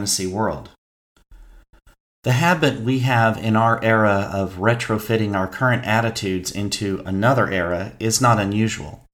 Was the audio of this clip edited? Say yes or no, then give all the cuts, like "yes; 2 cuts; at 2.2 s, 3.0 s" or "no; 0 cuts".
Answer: no; 0 cuts